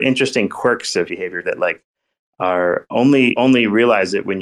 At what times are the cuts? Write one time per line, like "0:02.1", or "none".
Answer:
0:01.1
0:01.4
0:03.4